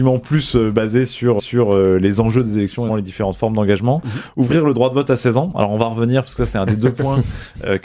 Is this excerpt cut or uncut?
cut